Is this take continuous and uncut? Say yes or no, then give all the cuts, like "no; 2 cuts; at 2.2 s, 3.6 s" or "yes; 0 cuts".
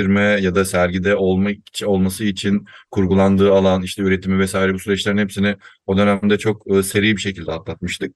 yes; 0 cuts